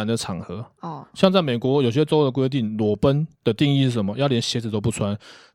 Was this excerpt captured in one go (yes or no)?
no